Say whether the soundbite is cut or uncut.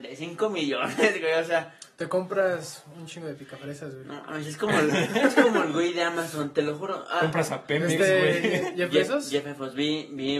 uncut